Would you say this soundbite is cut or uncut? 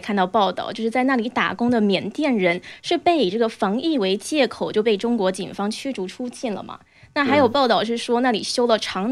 uncut